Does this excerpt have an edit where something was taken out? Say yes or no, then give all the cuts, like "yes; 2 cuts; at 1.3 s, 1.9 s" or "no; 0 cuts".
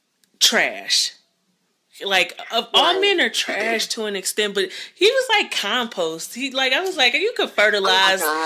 no; 0 cuts